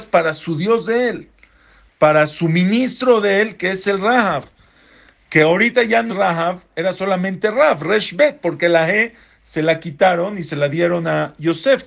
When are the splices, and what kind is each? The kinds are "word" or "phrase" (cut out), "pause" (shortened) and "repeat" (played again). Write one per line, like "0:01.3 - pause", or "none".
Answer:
0:06.1 - word

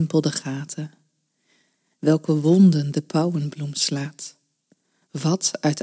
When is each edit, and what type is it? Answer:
none

